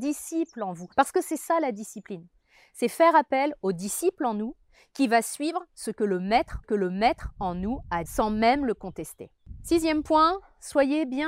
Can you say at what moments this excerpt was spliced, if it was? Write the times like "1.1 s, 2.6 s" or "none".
0.9 s, 6.6 s, 8.1 s